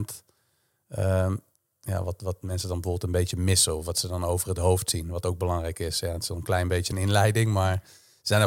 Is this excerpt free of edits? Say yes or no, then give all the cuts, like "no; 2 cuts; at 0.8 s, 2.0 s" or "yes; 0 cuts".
yes; 0 cuts